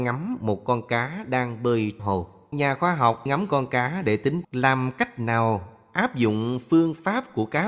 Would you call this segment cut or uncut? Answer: cut